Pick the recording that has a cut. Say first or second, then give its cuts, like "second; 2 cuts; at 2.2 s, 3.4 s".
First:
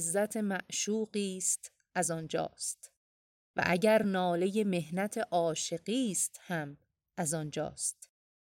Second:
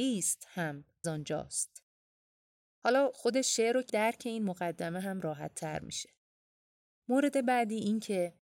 second; 2 cuts; at 1.0 s, 3.9 s